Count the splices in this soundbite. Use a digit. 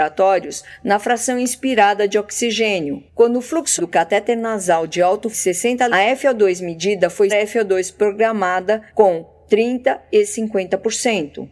6